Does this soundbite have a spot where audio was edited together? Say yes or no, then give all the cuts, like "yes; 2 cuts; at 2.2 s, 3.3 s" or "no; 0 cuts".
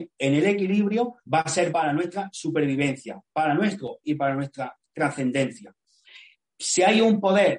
yes; 3 cuts; at 1.2 s, 1.7 s, 4.0 s